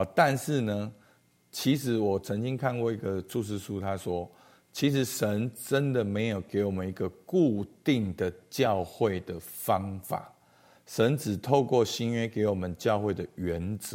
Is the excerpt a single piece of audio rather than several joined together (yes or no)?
yes